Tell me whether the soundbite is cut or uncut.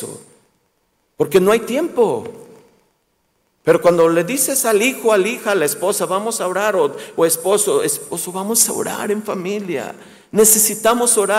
uncut